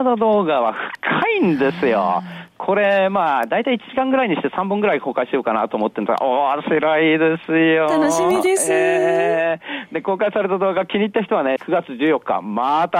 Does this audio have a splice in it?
yes; 1 cut; at 11.6 s

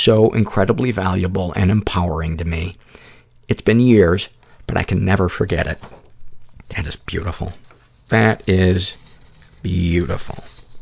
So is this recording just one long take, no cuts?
yes; 0 cuts

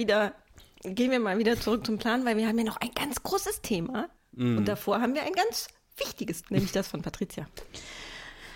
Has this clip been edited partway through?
yes; 2 cuts; at 4.2 s, 6.4 s

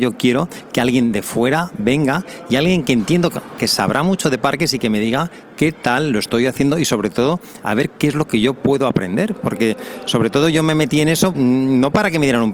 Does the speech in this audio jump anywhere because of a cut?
yes; 1 cut; at 11.3 s

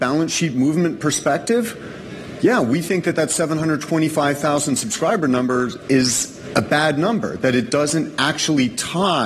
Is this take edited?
no; 0 cuts

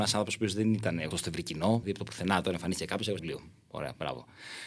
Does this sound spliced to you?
yes; 3 cuts; at 1.1 s, 1.8 s, 3.2 s

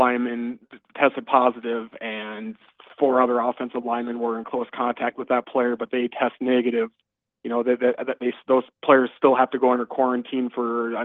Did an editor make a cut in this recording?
no; 0 cuts

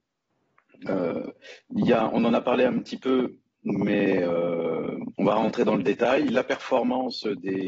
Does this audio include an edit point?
yes; 1 cut; at 5.2 s

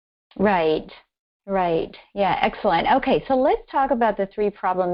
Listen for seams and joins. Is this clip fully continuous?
yes; 0 cuts

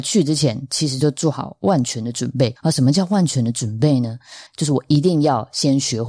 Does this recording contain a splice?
yes; 2 cuts; at 2.6 s, 4.5 s

